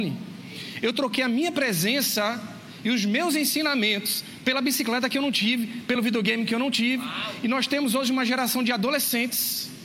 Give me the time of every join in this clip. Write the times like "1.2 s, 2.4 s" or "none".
none